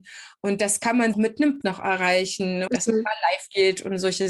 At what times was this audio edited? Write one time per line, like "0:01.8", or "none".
0:01.1
0:01.6
0:02.7